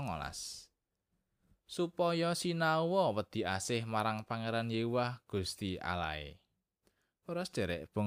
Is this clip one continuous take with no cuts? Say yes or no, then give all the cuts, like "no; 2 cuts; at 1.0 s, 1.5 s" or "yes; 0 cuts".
no; 1 cut; at 6.8 s